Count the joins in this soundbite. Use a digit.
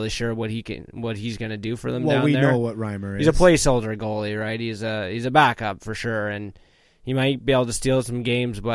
0